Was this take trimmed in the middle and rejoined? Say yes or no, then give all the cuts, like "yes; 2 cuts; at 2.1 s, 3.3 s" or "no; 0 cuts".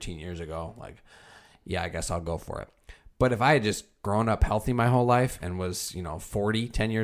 no; 0 cuts